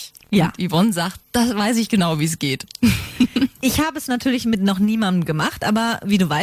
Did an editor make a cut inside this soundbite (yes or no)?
no